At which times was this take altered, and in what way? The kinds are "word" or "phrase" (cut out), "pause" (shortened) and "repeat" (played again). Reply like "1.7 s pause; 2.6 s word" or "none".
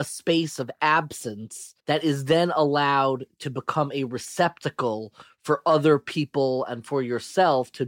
1.8 s pause